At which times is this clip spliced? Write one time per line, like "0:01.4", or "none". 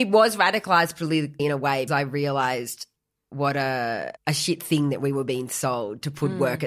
0:01.4
0:01.9
0:04.2